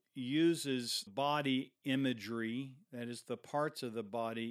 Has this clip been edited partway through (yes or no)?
yes